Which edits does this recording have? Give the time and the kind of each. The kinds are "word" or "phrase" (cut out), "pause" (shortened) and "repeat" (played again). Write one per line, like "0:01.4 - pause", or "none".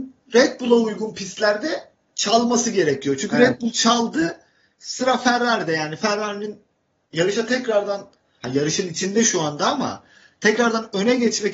none